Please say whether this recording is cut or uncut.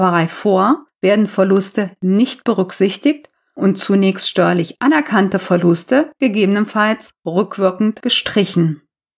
uncut